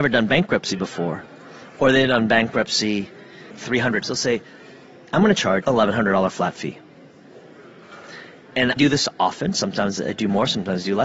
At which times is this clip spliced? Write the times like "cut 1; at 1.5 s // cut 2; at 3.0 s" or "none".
cut 1; at 4.0 s // cut 2; at 5.6 s // cut 3; at 8.8 s

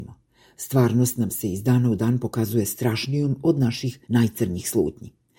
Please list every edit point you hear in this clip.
cut 1; at 4.0 s

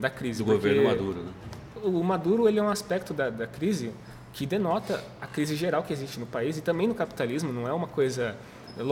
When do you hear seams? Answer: none

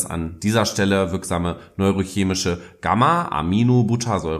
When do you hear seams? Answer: none

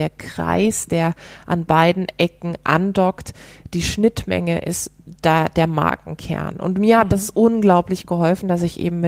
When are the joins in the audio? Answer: none

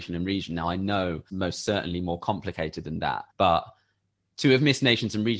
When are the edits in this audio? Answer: cut 1; at 1.3 s // cut 2; at 3.3 s

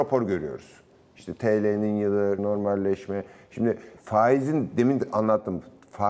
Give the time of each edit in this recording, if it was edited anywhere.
cut 1; at 2.4 s // cut 2; at 4.0 s

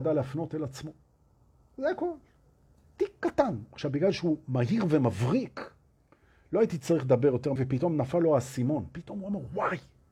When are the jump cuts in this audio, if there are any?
cut 1; at 7.6 s

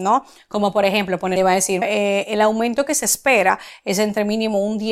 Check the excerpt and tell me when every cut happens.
cut 1; at 1.4 s // cut 2; at 1.8 s

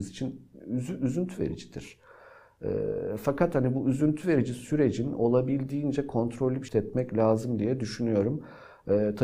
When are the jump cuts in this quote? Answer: cut 1; at 6.7 s

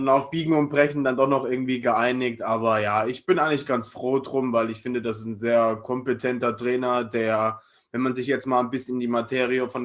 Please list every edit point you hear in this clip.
none

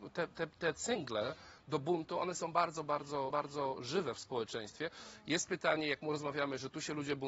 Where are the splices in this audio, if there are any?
cut 1; at 3.3 s

